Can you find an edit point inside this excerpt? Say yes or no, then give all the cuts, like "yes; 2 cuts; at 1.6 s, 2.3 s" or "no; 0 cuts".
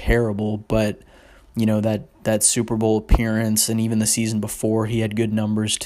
no; 0 cuts